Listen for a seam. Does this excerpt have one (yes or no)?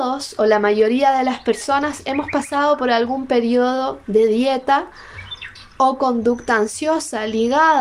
no